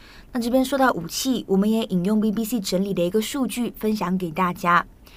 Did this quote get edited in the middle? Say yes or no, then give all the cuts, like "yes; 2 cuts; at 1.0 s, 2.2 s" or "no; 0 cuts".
no; 0 cuts